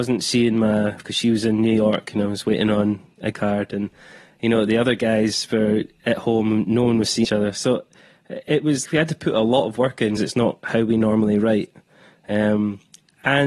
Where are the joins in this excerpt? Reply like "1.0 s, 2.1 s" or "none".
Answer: 1.0 s, 3.3 s, 7.2 s, 8.8 s, 10.2 s

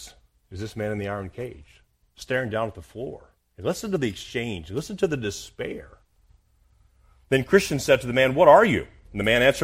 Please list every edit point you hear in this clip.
none

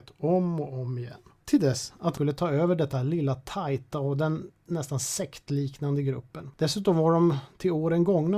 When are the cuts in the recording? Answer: none

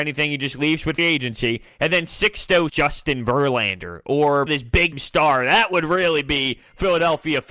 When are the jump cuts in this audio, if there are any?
1.0 s, 2.7 s, 4.5 s, 4.9 s

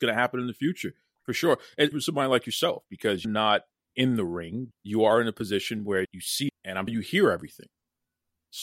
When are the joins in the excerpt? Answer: 1.9 s, 3.2 s, 3.9 s, 4.7 s, 6.0 s, 6.5 s, 6.9 s

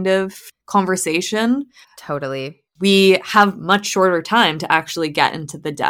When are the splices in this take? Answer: 2.7 s

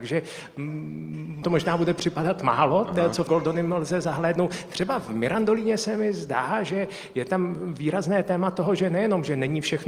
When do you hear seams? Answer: 1.4 s, 3.3 s

